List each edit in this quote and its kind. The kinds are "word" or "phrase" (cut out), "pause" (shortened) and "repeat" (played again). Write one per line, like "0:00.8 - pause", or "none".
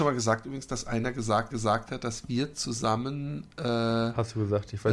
0:01.5 - repeat